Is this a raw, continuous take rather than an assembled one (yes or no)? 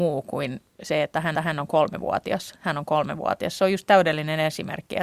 no